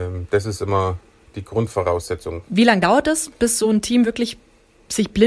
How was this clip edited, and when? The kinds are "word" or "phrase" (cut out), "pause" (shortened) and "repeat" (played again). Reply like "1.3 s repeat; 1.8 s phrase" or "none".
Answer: none